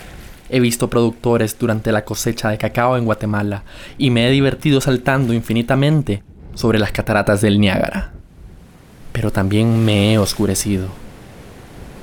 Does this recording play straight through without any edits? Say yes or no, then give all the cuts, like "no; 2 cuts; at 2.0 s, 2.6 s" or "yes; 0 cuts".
yes; 0 cuts